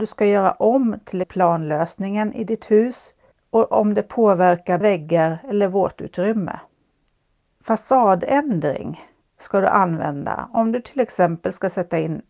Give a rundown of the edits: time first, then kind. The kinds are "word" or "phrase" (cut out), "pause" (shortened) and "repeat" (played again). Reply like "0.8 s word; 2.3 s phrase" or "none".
1.2 s word; 4.8 s word

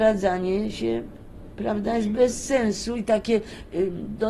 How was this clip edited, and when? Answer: none

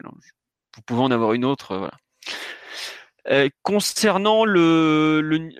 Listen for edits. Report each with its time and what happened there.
none

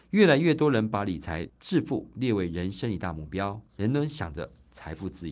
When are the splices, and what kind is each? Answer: 3.7 s pause

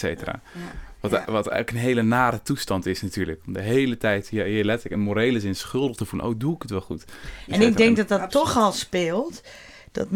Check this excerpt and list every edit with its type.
none

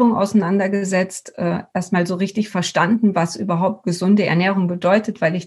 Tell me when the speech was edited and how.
none

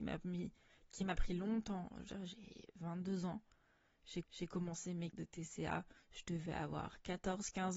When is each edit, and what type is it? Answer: 4.2 s repeat; 5.1 s word

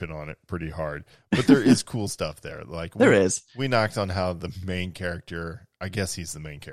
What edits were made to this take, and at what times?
none

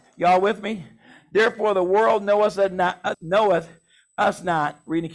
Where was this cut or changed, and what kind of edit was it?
3.1 s word

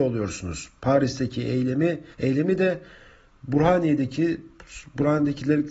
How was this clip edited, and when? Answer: 2.1 s pause

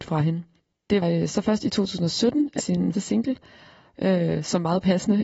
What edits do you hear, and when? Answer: 1.0 s word; 2.6 s phrase; 2.9 s word

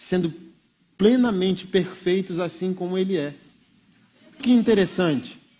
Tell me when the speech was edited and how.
4.4 s word

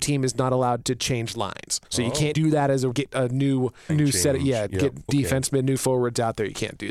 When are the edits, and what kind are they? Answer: 1.8 s pause; 2.3 s word; 2.9 s phrase; 3.9 s word; 5.1 s word

